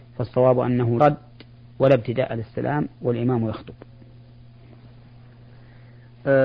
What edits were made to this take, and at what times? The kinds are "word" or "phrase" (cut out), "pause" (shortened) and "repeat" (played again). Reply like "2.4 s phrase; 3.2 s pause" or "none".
1.0 s word